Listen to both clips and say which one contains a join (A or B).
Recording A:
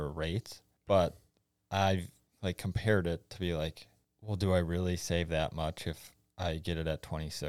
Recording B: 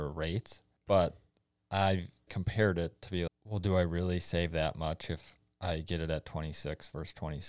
B